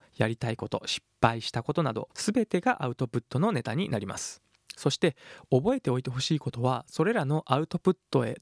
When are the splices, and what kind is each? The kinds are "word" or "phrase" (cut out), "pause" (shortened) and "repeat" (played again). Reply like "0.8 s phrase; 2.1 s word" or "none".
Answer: 2.1 s pause